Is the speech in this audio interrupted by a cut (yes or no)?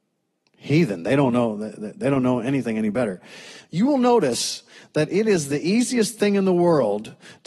no